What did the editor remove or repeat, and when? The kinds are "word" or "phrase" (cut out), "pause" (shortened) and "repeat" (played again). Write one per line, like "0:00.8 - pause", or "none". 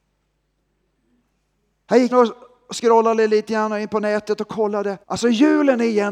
0:02.1 - word
0:05.0 - pause